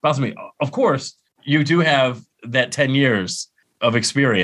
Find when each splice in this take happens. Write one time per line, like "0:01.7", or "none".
none

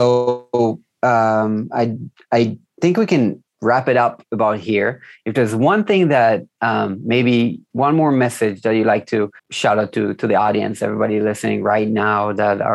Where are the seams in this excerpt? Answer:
0:09.4

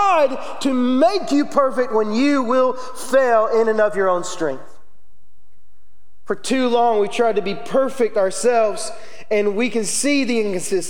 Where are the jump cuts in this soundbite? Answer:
none

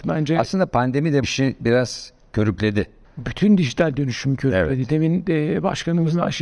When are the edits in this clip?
0:01.2
0:03.0

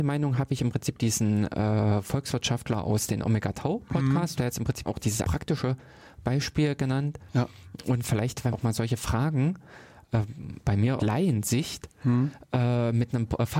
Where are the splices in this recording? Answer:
0:04.4
0:04.9
0:05.2
0:08.5
0:10.6
0:11.0

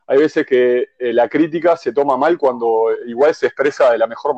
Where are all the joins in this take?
none

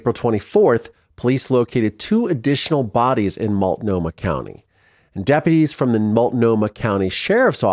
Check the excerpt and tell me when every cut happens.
none

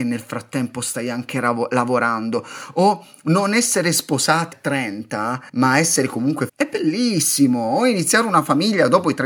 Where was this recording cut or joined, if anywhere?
0:04.5
0:05.5
0:06.5

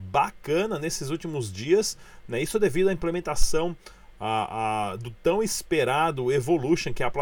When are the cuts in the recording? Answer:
none

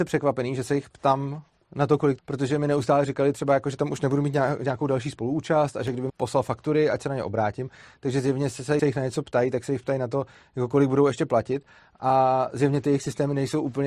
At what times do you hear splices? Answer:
0:02.2
0:06.1
0:08.8

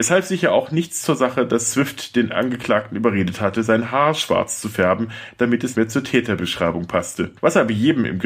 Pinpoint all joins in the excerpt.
0:05.7

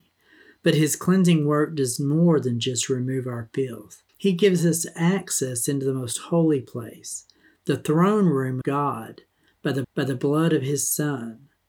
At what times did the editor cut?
0:04.1
0:08.6
0:09.8

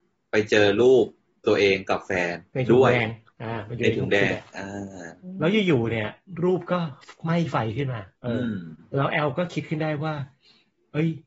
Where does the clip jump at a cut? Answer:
0:02.5
0:08.1

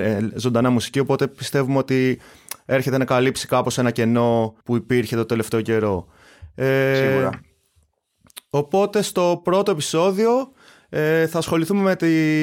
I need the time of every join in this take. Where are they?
0:04.6

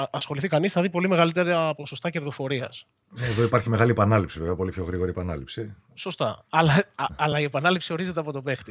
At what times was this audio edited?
none

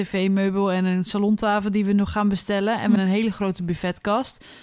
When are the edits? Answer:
0:03.0

